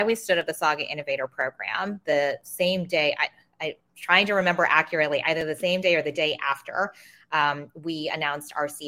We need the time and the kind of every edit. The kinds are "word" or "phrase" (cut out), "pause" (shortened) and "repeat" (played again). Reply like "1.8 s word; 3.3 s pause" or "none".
none